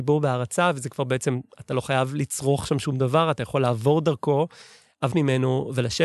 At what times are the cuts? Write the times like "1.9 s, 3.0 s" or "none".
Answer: 5.1 s